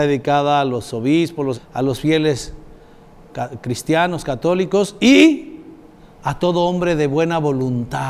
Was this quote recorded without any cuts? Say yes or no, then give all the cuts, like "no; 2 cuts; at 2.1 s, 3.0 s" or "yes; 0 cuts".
no; 1 cut; at 1.5 s